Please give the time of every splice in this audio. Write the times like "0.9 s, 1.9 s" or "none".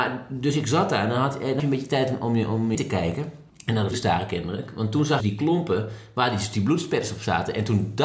1.6 s, 2.7 s, 3.5 s, 3.9 s, 5.2 s